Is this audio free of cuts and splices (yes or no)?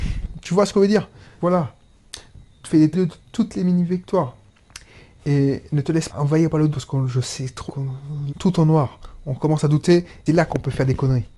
no